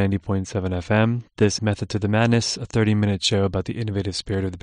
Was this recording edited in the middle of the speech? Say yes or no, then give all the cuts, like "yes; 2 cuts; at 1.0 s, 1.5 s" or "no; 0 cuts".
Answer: yes; 1 cut; at 1.6 s